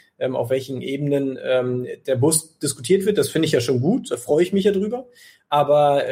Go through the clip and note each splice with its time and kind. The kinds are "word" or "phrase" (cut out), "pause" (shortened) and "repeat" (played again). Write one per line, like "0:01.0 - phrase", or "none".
none